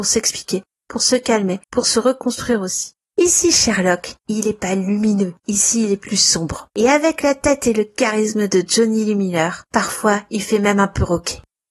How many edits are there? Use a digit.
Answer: 1